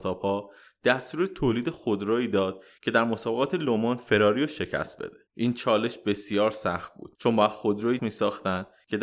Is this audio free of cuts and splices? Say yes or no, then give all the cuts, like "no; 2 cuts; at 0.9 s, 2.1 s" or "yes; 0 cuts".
no; 3 cuts; at 5.3 s, 7.1 s, 8.0 s